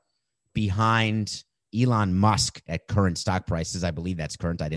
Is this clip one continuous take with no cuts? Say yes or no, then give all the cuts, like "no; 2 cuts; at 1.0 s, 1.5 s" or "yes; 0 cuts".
yes; 0 cuts